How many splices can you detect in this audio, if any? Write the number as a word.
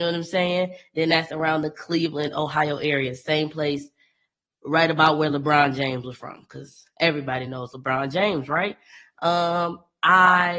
zero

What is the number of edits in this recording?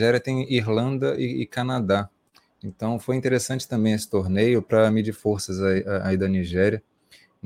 zero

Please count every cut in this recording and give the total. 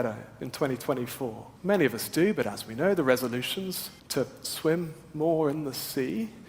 two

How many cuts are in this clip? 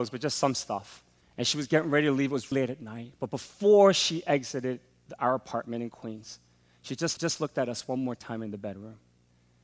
three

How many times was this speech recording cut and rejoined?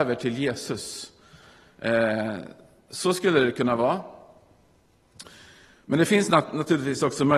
zero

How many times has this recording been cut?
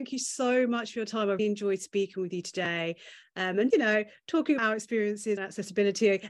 four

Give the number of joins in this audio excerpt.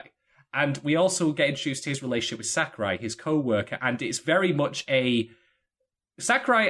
zero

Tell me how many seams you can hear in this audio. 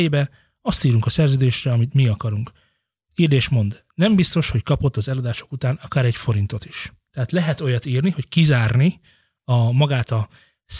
zero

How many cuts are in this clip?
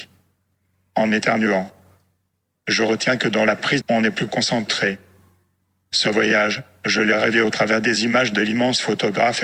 one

